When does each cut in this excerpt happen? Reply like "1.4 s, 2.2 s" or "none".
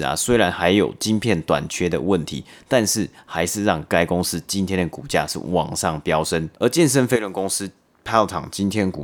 6.5 s